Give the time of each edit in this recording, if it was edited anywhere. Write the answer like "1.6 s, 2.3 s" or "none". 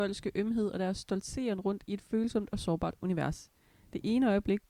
none